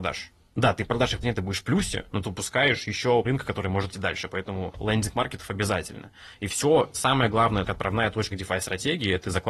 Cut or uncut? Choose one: cut